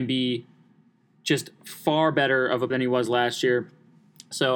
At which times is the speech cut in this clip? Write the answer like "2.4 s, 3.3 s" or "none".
2.7 s